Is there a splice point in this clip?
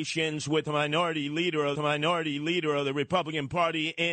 yes; 1 cut; at 1.7 s

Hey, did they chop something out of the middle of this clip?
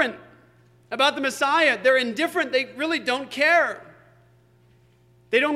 no; 0 cuts

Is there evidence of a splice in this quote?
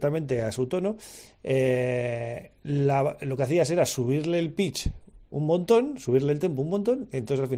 no; 0 cuts

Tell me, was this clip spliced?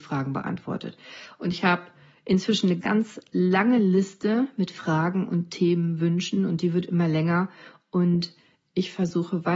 yes; 1 cut; at 2.8 s

